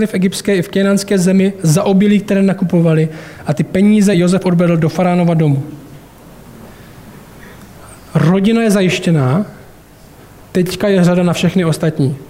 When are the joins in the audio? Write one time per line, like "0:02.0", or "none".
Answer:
none